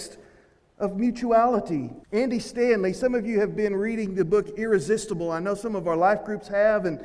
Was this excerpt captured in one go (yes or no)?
no